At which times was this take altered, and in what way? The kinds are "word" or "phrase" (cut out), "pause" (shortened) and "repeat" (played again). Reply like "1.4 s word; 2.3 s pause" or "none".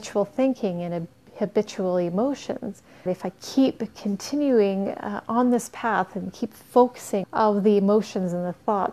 3.1 s word; 7.2 s word